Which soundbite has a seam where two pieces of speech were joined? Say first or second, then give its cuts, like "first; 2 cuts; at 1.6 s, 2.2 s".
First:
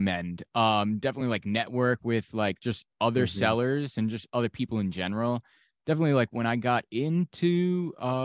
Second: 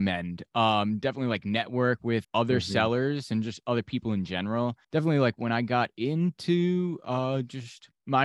second; 2 cuts; at 2.2 s, 4.8 s